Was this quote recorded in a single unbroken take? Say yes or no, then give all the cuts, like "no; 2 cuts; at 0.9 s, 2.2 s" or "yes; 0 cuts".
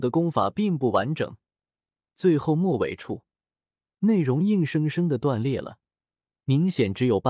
yes; 0 cuts